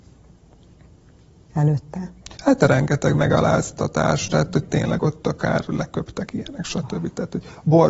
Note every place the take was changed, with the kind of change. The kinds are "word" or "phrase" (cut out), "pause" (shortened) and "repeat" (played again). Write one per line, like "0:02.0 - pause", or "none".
0:02.3 - pause